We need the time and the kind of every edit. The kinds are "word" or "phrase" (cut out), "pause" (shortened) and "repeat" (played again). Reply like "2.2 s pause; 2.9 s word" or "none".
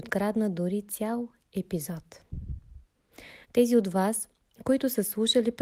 3.4 s pause